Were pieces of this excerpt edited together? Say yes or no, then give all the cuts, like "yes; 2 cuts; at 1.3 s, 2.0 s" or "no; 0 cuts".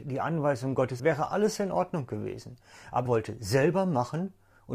yes; 2 cuts; at 1.0 s, 3.1 s